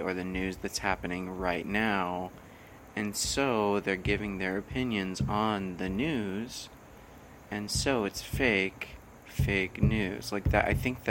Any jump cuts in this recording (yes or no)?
no